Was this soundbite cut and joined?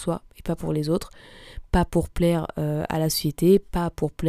no; 0 cuts

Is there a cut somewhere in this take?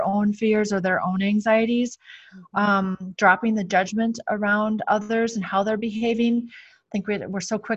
no; 0 cuts

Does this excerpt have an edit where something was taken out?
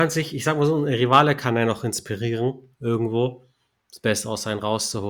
no; 0 cuts

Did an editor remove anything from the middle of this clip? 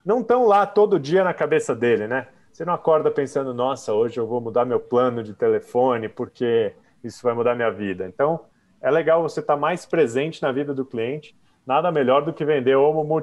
no; 0 cuts

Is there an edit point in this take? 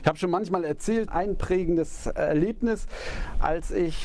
yes; 1 cut; at 1.1 s

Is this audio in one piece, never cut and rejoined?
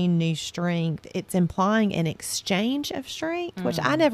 no; 1 cut; at 1.1 s

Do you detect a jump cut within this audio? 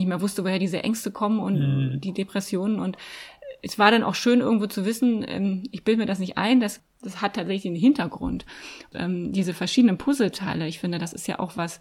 no; 0 cuts

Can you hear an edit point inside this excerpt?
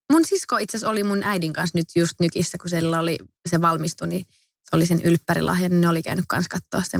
no; 0 cuts

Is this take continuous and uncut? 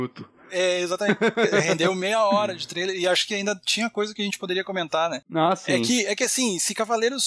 yes; 0 cuts

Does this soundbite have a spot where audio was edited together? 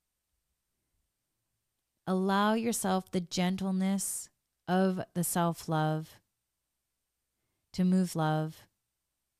yes; 2 cuts; at 4.5 s, 8.1 s

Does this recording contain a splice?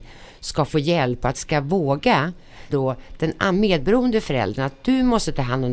yes; 2 cuts; at 1.3 s, 2.7 s

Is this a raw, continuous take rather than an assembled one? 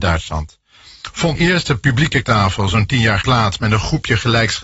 no; 3 cuts; at 1.4 s, 2.2 s, 3.2 s

